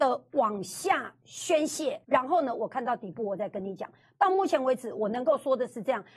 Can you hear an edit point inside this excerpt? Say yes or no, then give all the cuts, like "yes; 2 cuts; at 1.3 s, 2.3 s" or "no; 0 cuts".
yes; 1 cut; at 2.0 s